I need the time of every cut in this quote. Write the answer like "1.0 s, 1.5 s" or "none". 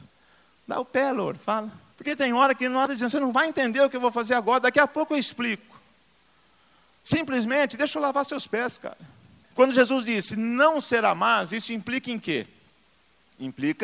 2.9 s